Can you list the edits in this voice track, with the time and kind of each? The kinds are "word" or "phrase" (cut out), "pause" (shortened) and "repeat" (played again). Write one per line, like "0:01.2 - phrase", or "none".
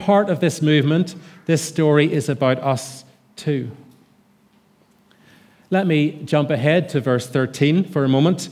none